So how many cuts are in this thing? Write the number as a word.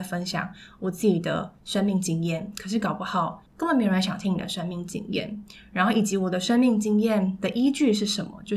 one